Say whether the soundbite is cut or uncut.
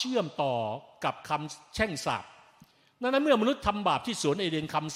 uncut